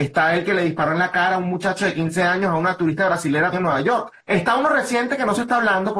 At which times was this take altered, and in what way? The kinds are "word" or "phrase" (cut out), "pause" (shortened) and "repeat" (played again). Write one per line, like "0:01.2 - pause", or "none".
0:03.5 - word
0:04.2 - pause

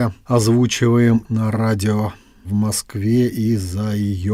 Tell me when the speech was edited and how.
0:01.2 - word

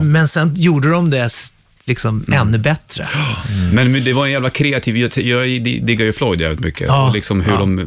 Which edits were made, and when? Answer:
none

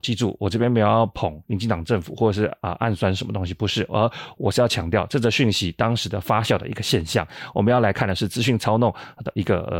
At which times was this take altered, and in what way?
0:01.4 - pause

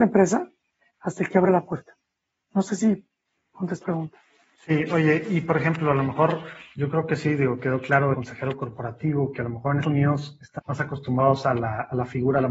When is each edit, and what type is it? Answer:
0:03.8 - word
0:08.1 - word
0:09.8 - word
0:10.6 - word

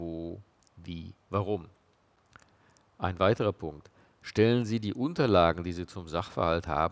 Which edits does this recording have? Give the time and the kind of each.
0:01.2 - pause

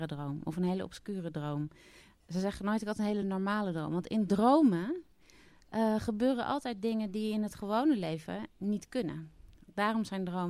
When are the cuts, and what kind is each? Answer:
none

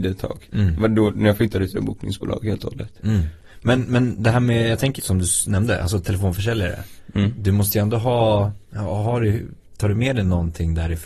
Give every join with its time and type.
0:01.7 - phrase
0:05.0 - word
0:08.6 - pause
0:09.6 - pause

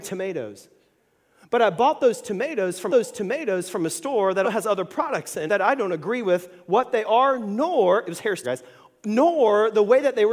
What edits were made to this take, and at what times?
0:02.9 - repeat
0:04.4 - word
0:05.5 - word
0:08.4 - word

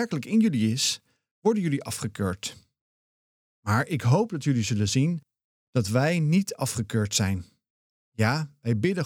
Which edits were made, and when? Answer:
none

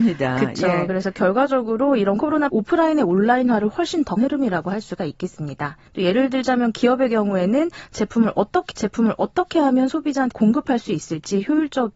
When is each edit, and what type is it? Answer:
0:02.5 - word
0:04.2 - phrase
0:05.9 - pause
0:08.7 - repeat
0:10.3 - word

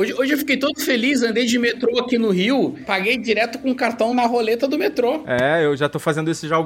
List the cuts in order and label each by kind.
0:04.1 - word

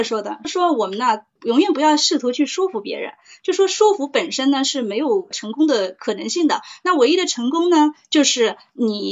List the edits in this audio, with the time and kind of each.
none

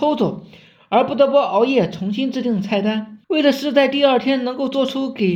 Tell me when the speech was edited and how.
0:03.2 - pause

